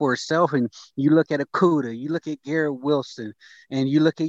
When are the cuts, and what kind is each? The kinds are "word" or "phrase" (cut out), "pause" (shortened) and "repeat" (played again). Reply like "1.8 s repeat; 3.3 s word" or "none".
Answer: none